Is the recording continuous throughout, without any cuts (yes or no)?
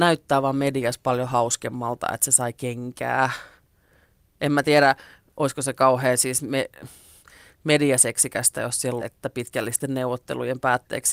no